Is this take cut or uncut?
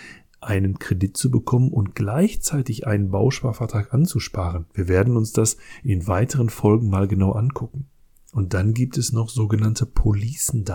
uncut